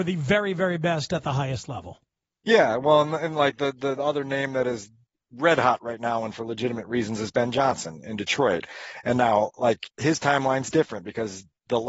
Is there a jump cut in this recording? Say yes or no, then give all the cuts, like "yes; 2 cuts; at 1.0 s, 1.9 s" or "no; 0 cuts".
no; 0 cuts